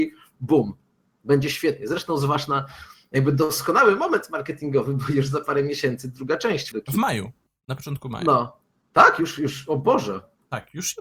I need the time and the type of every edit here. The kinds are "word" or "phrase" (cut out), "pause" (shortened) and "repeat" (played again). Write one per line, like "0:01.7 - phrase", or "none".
0:06.7 - word